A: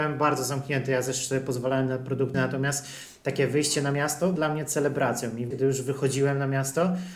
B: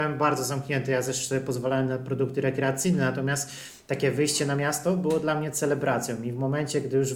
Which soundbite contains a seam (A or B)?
A